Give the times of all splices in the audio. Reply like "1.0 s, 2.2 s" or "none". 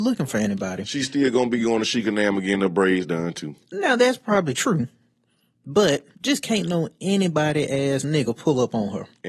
6.1 s